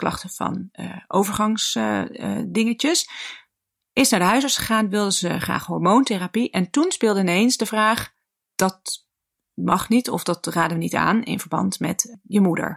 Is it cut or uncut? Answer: uncut